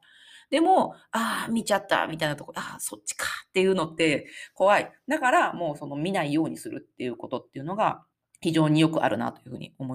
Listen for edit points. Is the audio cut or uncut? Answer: cut